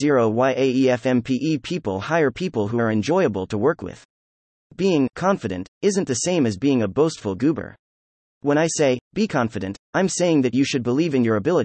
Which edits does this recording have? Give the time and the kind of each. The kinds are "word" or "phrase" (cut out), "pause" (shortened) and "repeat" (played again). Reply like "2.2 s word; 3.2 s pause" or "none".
none